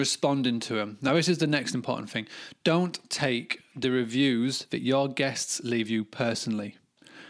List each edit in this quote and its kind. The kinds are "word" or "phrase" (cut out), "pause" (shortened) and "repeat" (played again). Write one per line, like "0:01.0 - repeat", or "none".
none